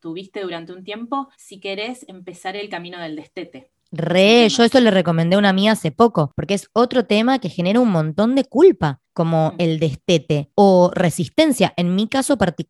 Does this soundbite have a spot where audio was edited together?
yes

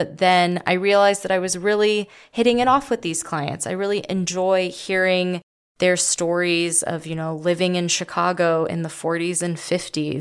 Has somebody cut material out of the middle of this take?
no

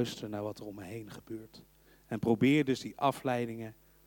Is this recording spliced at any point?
no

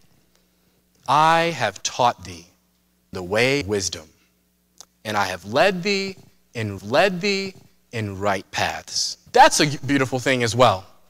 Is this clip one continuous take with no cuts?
no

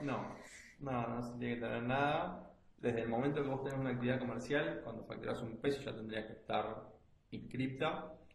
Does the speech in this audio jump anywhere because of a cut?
no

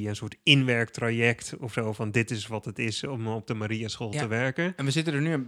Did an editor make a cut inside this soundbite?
no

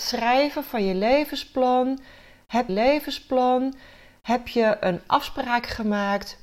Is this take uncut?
no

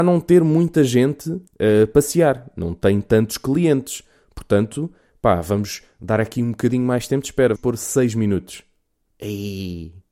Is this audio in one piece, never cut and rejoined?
no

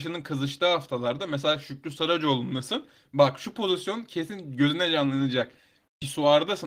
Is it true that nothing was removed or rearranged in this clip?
yes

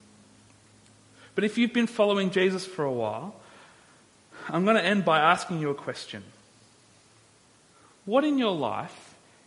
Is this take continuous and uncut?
yes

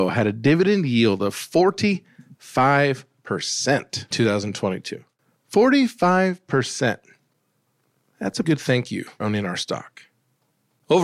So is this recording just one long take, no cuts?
no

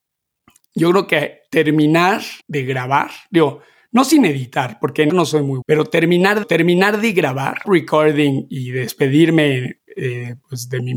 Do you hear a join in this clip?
yes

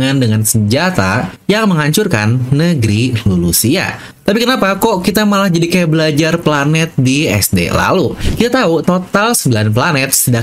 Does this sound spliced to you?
yes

